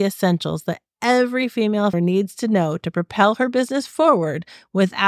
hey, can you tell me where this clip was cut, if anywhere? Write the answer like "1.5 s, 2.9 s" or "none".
1.9 s